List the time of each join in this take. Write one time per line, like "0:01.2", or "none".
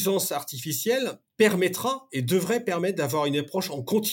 0:01.3

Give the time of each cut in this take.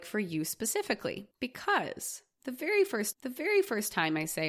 0:01.3
0:03.1

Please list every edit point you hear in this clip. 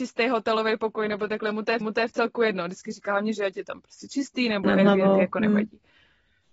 0:01.8
0:04.6

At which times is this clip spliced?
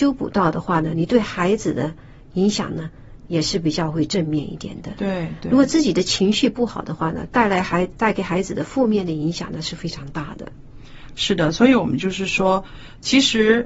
none

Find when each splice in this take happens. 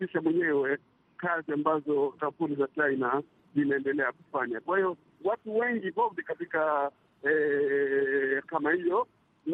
0:02.1
0:05.9
0:08.4

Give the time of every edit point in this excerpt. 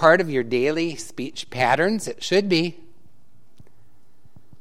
none

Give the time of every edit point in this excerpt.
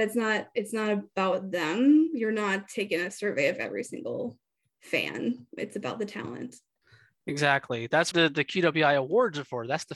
0:05.6
0:08.1

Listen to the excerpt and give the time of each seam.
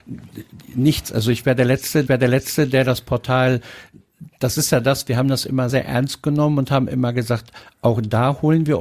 0:02.1
0:05.7

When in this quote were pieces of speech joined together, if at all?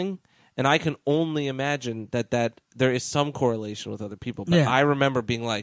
none

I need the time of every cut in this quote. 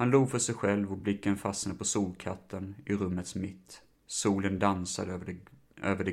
none

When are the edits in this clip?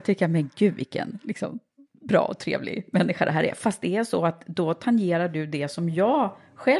none

